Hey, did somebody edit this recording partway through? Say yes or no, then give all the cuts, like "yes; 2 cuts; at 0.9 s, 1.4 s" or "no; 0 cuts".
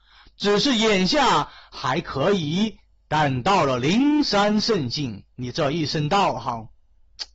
yes; 1 cut; at 5.3 s